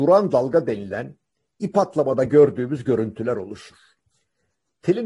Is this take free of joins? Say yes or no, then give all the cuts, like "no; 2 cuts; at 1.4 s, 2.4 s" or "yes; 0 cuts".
yes; 0 cuts